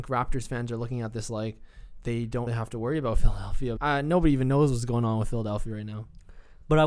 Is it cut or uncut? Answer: cut